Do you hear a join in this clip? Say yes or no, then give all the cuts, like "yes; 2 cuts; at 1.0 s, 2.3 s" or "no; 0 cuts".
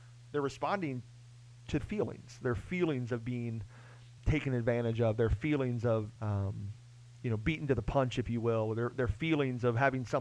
yes; 3 cuts; at 1.8 s, 4.2 s, 6.2 s